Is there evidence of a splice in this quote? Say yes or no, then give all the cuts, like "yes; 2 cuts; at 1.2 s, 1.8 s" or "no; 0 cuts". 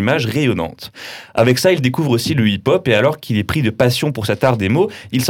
no; 0 cuts